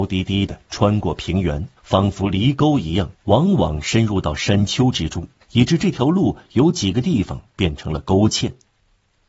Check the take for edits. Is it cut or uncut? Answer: cut